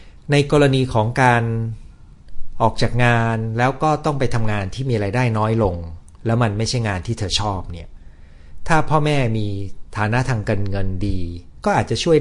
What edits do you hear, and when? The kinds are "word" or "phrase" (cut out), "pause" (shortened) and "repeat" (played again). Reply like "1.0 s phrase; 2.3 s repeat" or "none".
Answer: 6.1 s pause